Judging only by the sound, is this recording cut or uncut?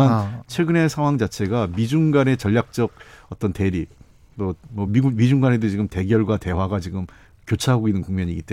uncut